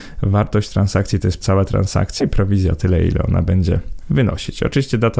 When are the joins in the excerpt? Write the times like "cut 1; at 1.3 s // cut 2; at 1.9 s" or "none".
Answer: cut 1; at 1.4 s // cut 2; at 2.2 s